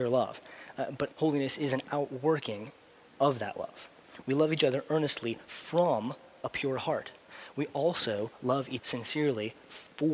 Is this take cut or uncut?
cut